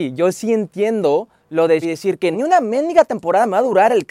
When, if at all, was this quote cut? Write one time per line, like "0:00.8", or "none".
0:01.4
0:01.8
0:02.3